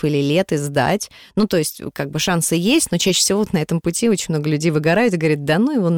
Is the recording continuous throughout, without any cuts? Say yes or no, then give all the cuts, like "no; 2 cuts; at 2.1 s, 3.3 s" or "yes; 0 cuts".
yes; 0 cuts